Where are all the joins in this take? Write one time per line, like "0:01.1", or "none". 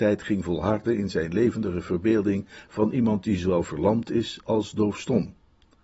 none